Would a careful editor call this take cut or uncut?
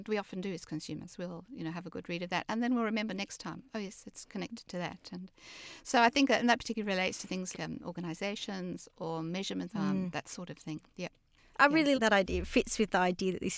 cut